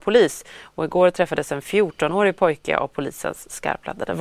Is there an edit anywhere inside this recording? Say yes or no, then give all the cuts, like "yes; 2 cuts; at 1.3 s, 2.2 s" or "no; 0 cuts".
no; 0 cuts